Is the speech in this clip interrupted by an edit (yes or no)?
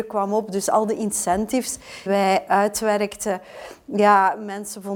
yes